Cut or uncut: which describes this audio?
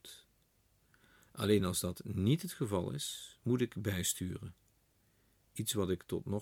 uncut